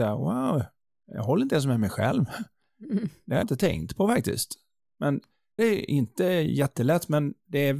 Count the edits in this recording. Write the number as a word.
two